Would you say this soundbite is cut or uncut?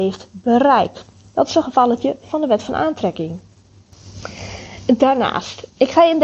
uncut